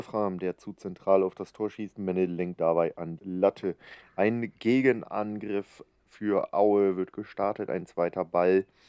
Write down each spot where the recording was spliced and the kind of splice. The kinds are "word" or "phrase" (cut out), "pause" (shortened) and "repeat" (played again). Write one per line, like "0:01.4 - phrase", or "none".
0:02.6 - word
0:03.2 - word